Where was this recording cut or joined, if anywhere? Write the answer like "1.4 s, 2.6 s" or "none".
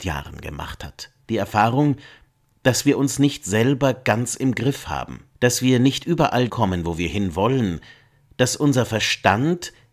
1.2 s, 5.3 s, 6.5 s

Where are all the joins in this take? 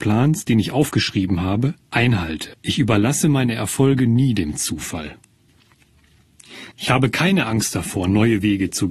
2.5 s, 6.7 s

